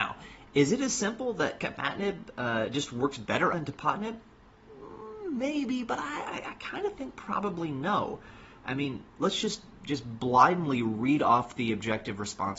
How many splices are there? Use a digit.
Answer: 1